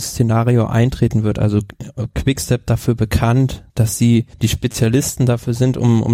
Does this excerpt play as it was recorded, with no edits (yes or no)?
no